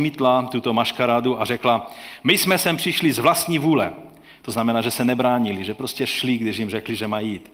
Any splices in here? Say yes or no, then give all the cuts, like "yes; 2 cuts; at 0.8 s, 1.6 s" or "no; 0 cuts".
no; 0 cuts